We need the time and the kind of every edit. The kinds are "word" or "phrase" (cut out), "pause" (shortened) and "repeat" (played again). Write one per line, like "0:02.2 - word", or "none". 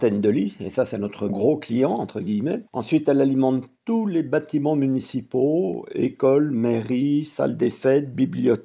0:01.3 - word
0:02.7 - pause